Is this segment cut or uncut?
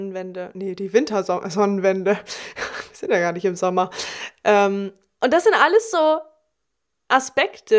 uncut